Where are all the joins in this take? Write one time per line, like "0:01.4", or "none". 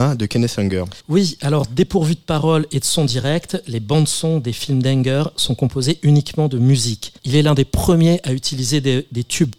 0:01.0
0:07.2